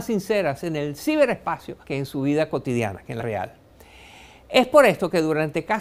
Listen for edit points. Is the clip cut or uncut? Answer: cut